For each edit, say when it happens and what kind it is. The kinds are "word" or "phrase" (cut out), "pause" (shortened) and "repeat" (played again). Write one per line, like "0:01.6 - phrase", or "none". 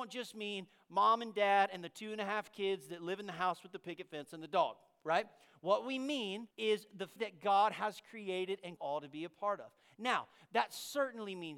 0:06.5 - pause
0:07.2 - word
0:08.8 - phrase